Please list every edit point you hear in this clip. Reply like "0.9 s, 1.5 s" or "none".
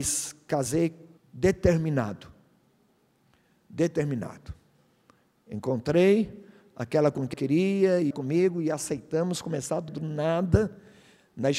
1.2 s, 7.3 s, 8.1 s, 9.9 s